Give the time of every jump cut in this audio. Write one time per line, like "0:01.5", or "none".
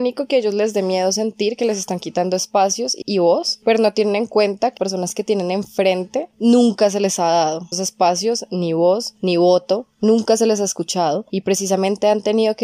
0:03.0
0:04.8
0:07.7